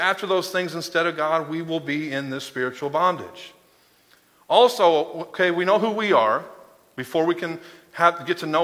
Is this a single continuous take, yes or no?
yes